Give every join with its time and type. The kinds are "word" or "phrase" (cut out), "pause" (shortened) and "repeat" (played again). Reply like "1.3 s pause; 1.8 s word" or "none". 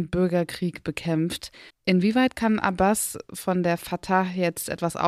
1.7 s pause

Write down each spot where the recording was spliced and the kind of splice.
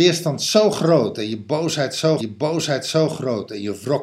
2.2 s repeat

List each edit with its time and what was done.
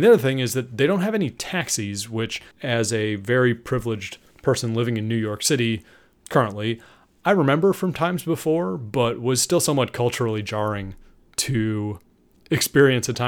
2.5 s pause

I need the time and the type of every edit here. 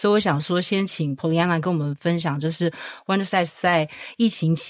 none

